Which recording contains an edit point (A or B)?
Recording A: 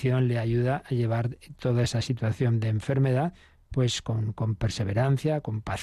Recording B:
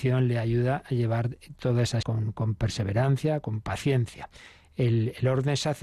B